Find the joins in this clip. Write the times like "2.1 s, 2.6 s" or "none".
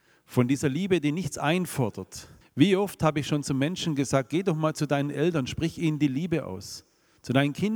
2.4 s